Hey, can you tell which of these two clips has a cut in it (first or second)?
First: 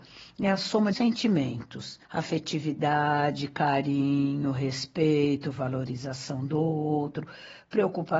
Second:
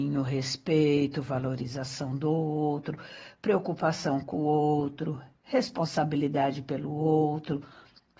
first